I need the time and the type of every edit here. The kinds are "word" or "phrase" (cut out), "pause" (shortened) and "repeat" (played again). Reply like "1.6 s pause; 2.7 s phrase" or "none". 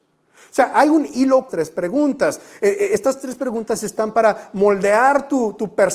1.5 s phrase